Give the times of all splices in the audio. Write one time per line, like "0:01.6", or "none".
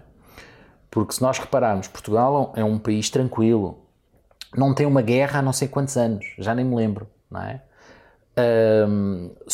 none